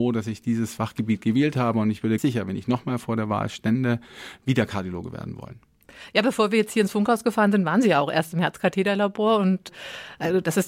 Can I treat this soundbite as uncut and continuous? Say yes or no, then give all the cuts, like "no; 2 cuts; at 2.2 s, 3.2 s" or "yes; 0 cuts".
no; 1 cut; at 2.2 s